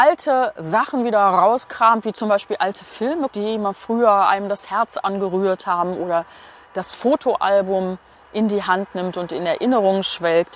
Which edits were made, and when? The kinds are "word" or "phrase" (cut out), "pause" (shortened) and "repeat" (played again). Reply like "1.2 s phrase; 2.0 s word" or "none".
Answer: 3.3 s word